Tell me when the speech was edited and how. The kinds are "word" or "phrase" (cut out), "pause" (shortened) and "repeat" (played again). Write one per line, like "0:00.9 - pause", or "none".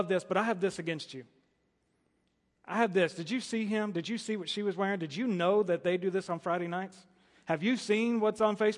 none

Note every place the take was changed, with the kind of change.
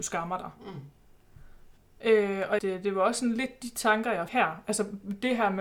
0:01.8 - pause
0:02.6 - phrase
0:04.3 - word

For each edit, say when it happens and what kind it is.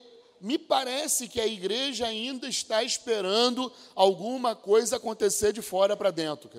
none

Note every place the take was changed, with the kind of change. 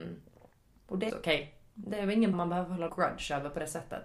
0:01.1 - word
0:02.3 - word
0:02.9 - word

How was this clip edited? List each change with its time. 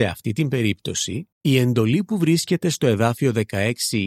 0:01.3 - pause

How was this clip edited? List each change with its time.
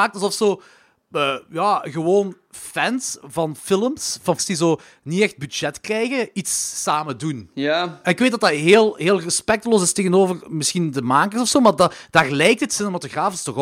0:04.4 - word

